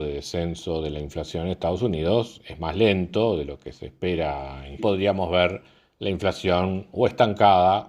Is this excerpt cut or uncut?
cut